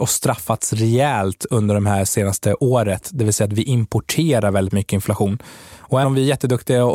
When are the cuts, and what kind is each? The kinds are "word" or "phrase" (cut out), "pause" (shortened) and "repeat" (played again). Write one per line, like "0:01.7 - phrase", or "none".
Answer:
0:06.0 - word